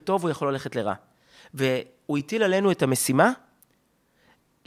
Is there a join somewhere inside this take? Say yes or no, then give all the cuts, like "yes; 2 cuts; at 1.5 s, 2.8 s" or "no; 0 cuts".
no; 0 cuts